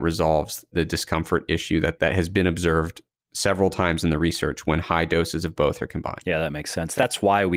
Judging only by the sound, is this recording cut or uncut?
uncut